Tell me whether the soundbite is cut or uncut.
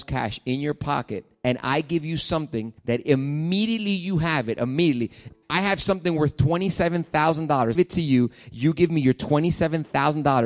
cut